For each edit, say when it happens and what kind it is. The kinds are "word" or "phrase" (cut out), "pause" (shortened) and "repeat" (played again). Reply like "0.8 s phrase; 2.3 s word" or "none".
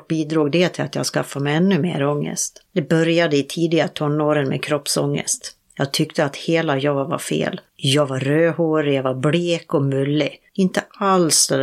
2.7 s pause; 5.6 s pause; 7.7 s pause; 10.5 s pause